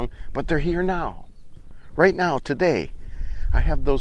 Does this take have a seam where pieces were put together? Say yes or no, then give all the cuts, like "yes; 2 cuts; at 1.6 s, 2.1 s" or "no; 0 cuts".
no; 0 cuts